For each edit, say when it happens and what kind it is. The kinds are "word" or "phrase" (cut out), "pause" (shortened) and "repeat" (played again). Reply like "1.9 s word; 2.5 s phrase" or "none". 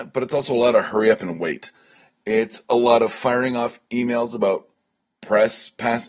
none